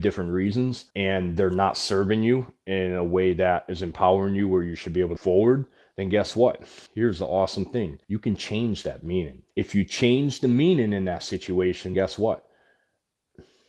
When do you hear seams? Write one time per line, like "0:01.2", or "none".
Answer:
0:00.9
0:05.2
0:06.9
0:08.0
0:09.5
0:11.9